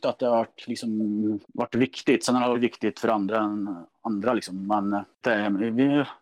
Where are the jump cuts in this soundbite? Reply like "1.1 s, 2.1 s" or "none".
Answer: 1.4 s, 2.5 s, 5.2 s

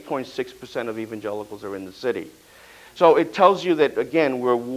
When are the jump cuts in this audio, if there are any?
none

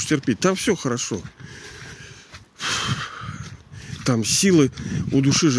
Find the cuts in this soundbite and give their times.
none

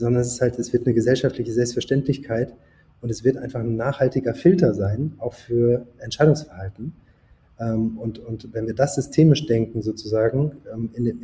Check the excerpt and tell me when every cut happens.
none

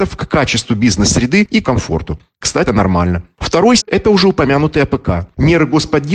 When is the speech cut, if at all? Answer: 1.6 s, 2.7 s, 3.8 s

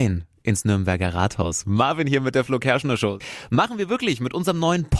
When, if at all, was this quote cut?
none

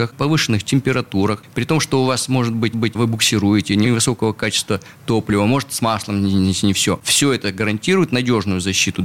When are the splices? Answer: 2.7 s, 3.8 s

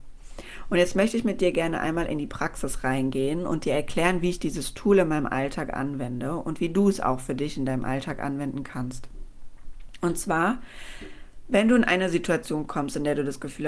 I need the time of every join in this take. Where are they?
none

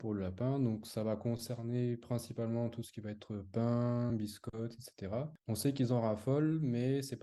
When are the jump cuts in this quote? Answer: none

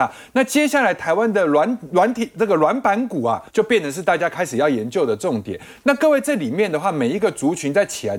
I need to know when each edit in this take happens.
3.5 s

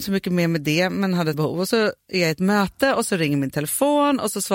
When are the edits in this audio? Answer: 1.3 s, 1.7 s

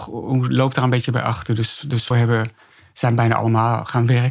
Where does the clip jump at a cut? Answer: 2.1 s

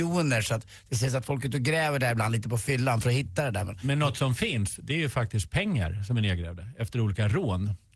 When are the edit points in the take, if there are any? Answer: none

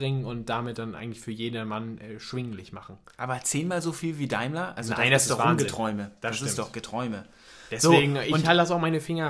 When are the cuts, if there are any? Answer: none

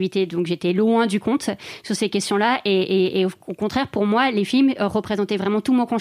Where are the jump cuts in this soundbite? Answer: none

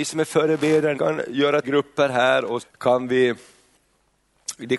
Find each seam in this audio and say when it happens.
0.9 s, 1.6 s, 2.6 s

